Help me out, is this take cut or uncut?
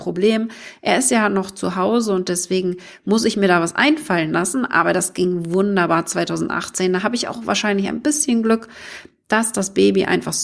uncut